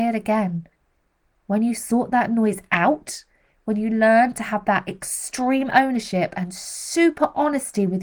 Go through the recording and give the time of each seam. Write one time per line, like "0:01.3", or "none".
none